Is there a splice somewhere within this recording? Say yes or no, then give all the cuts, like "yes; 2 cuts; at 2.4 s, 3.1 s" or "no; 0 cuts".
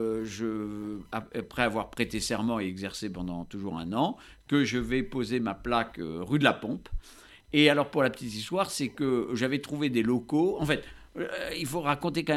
no; 0 cuts